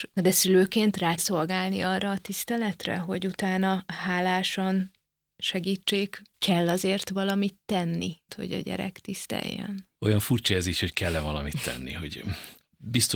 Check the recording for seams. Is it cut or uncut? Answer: cut